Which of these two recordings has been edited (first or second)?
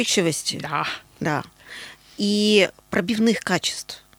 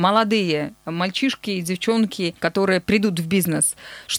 second